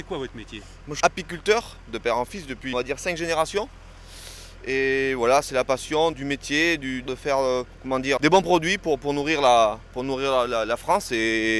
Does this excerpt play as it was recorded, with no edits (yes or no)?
no